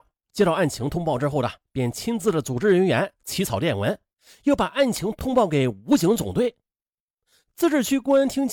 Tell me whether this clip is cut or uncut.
uncut